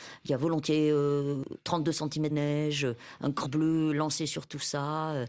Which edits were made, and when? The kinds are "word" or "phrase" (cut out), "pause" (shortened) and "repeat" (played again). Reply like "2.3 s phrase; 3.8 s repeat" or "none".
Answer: 2.3 s word; 3.4 s word